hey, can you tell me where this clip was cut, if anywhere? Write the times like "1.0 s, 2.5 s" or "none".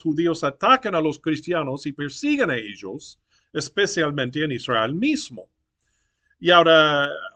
none